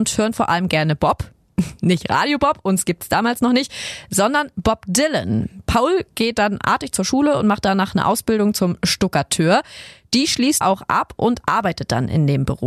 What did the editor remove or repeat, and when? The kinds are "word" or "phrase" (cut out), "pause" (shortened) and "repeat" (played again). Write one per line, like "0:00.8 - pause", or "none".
0:10.6 - word